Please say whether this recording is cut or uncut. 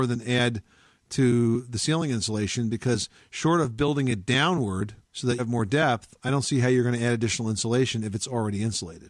cut